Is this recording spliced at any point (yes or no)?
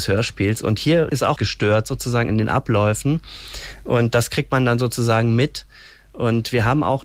yes